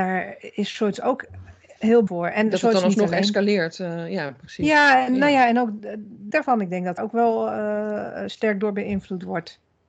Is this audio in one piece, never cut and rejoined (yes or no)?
no